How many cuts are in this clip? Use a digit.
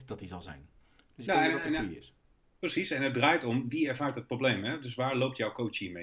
0